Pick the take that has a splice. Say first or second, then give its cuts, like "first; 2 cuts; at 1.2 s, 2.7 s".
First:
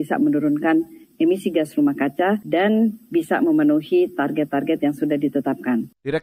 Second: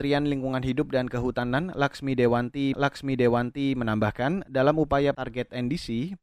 second; 2 cuts; at 2.7 s, 5.1 s